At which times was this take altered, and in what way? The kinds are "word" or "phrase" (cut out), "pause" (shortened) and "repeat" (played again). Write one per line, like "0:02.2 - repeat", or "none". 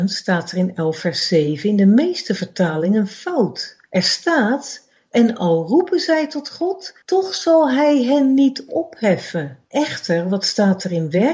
0:03.9 - pause
0:07.0 - pause
0:09.6 - pause